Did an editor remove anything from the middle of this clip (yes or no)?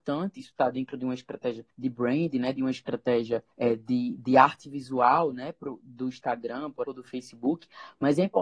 yes